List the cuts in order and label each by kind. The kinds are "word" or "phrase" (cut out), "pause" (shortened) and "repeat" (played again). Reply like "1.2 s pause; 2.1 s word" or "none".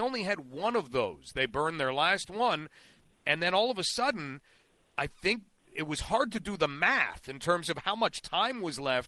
none